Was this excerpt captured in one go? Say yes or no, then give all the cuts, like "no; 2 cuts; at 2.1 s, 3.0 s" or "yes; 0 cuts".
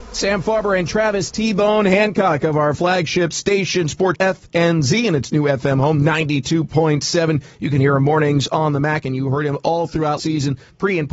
no; 3 cuts; at 4.1 s, 9.0 s, 10.2 s